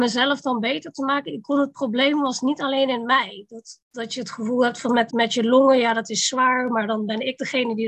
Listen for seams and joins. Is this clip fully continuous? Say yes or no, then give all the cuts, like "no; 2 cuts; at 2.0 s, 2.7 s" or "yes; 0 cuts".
no; 1 cut; at 5.1 s